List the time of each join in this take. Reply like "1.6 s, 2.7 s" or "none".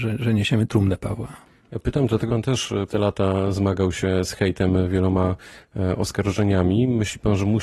2.3 s, 2.9 s